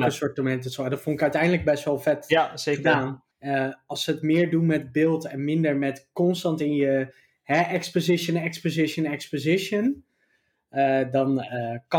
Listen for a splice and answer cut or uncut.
cut